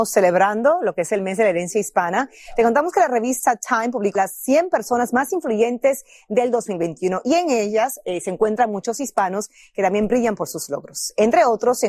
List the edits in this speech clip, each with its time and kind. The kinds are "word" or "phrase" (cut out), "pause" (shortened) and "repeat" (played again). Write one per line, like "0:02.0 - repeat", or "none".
0:04.2 - phrase